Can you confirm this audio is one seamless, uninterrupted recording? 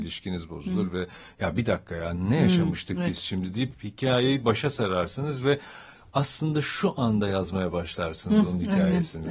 yes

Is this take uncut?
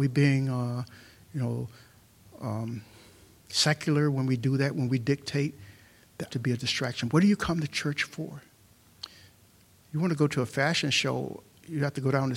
no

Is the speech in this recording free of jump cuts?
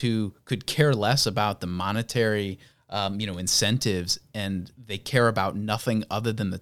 yes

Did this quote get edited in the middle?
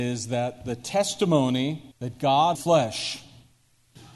yes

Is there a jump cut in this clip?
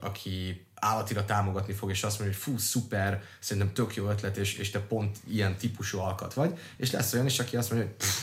no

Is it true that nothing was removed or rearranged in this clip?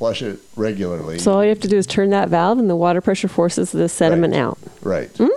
yes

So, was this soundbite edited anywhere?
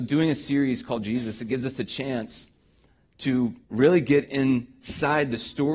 yes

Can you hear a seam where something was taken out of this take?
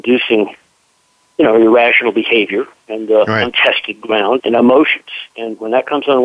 yes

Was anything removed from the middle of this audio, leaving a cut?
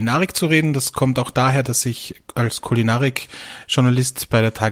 no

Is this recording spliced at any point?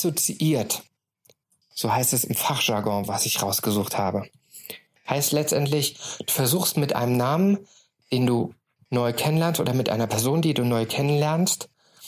no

